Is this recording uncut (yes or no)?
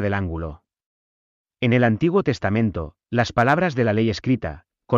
yes